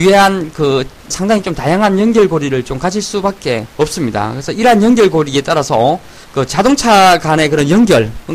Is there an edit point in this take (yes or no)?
yes